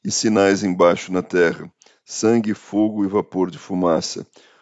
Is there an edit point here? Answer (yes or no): no